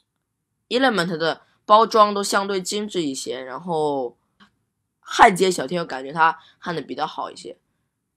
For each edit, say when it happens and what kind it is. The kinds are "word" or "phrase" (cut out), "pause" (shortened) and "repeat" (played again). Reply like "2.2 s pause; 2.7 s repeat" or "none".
none